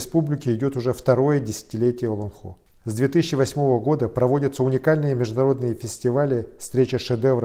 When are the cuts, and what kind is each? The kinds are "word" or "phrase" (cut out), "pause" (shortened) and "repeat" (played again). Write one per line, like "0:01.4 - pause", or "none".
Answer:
none